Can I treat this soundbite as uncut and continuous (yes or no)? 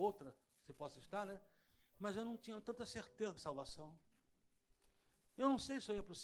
no